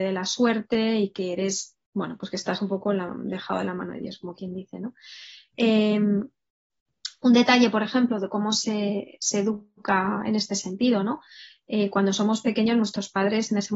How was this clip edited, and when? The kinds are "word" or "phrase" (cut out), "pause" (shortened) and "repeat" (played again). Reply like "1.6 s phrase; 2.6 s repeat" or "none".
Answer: 1.9 s pause